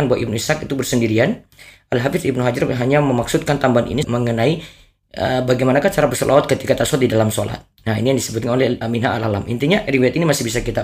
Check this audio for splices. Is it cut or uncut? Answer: uncut